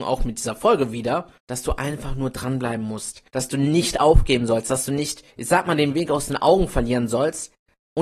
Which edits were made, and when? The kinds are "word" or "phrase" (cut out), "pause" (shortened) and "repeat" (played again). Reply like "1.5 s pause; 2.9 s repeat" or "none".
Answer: 1.4 s pause; 3.3 s pause; 5.3 s pause